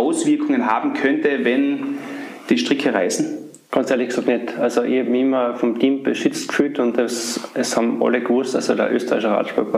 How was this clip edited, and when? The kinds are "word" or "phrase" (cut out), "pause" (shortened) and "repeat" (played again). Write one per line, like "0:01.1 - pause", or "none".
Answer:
0:03.6 - pause